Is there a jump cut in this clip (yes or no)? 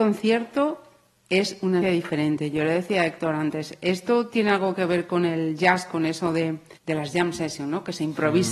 yes